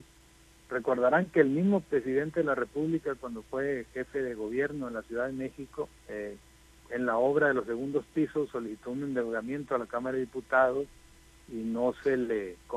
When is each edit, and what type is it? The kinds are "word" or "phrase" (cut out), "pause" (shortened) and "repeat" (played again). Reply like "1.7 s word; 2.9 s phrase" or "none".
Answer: 6.0 s pause